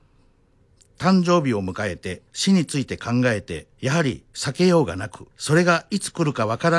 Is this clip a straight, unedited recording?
no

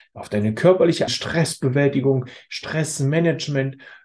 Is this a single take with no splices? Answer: no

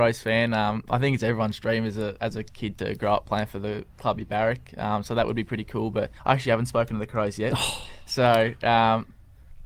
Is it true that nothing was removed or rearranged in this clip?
no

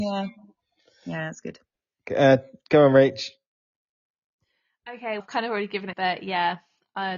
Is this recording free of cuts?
no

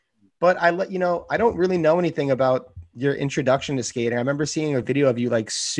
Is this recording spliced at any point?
no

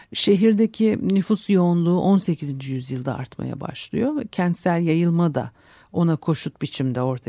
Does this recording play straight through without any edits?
yes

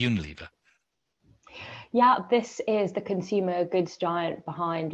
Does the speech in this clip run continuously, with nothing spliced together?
yes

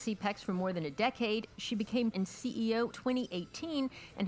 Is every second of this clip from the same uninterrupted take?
no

